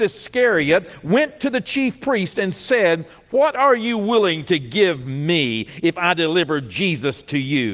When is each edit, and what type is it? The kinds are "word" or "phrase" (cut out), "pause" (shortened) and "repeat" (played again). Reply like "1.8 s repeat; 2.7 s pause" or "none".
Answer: none

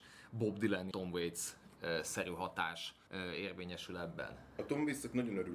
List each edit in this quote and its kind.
0.9 s word; 3.1 s pause

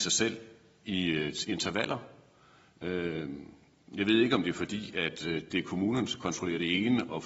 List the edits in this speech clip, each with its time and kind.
none

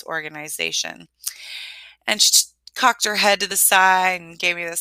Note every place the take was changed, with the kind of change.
none

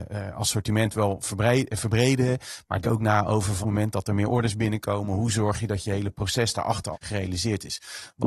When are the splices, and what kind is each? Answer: 2.8 s word; 3.6 s phrase; 6.9 s word

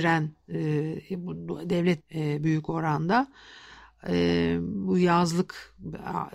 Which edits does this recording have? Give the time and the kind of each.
2.0 s phrase

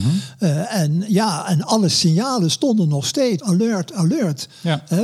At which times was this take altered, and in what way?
3.4 s phrase

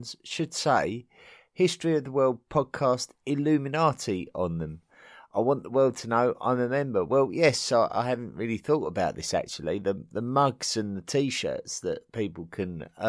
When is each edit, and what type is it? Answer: none

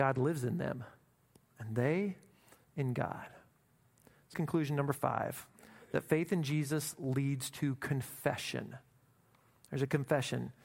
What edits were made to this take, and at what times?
4.3 s word

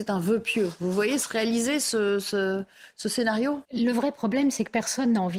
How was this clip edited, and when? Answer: 3.6 s pause

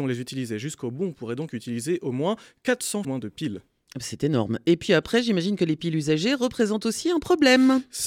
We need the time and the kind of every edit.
3.0 s word

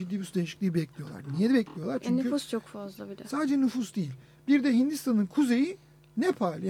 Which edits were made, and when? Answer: none

